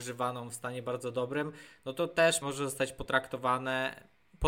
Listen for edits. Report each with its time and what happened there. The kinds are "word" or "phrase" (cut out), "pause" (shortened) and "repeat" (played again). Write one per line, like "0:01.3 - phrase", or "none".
0:02.1 - word
0:02.4 - word